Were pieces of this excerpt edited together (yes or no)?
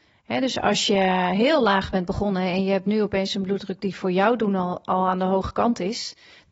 no